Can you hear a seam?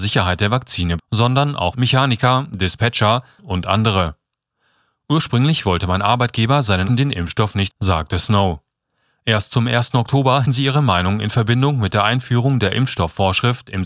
yes; 6 cuts; at 1.0 s, 1.7 s, 3.4 s, 6.9 s, 7.7 s, 10.4 s

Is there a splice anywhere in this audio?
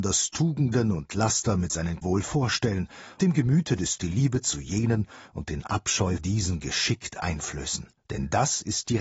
yes; 5 cuts; at 2.0 s, 3.2 s, 4.0 s, 6.2 s, 8.0 s

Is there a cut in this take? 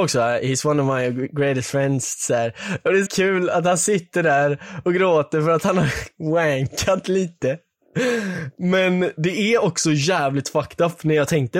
yes; 1 cut; at 3.1 s

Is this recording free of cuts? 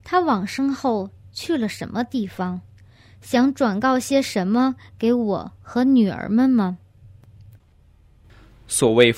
yes; 0 cuts

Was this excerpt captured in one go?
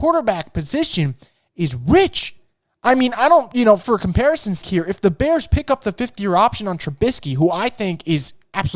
no; 2 cuts; at 3.8 s, 4.6 s

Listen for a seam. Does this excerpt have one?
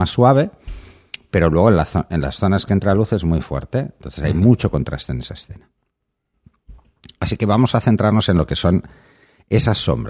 no; 0 cuts

